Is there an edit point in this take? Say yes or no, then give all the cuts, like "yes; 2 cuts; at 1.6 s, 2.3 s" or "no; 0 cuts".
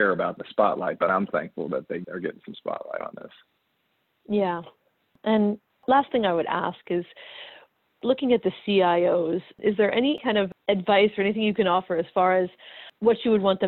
no; 0 cuts